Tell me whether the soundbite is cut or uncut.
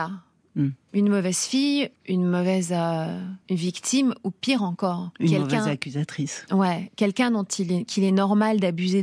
cut